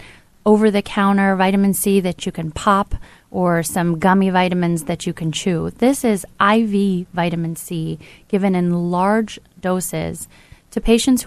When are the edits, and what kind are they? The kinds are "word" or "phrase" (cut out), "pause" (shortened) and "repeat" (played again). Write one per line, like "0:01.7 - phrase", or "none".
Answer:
none